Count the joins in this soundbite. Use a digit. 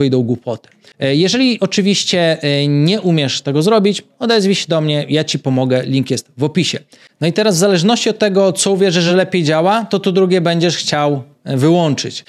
0